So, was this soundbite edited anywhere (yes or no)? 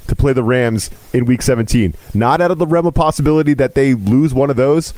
yes